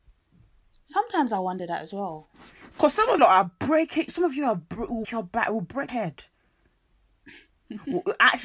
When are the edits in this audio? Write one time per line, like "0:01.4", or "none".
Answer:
0:03.2
0:05.0
0:05.9